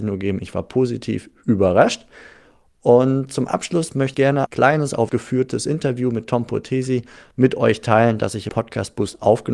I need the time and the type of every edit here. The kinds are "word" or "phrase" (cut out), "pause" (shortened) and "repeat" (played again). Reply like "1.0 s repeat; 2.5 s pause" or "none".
4.1 s word; 4.5 s word; 5.1 s word; 8.5 s word